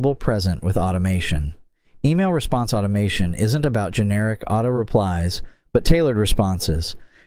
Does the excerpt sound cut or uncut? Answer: uncut